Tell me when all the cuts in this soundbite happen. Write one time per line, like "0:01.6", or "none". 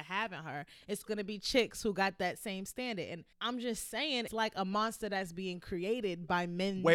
0:01.1
0:03.3
0:04.3